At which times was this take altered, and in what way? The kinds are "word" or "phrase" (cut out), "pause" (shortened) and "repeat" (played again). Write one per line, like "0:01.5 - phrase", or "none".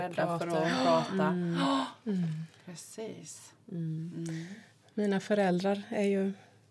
none

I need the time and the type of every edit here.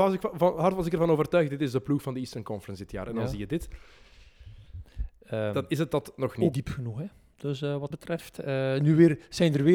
0:06.5 - word
0:07.9 - word

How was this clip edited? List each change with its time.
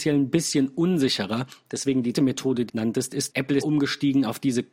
0:02.1 - word
0:02.7 - word
0:03.3 - word
0:03.6 - word

